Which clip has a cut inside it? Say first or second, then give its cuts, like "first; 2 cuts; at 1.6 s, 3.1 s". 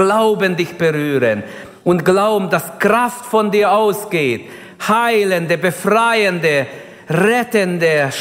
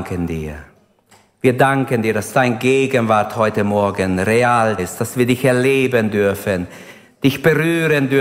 second; 1 cut; at 4.8 s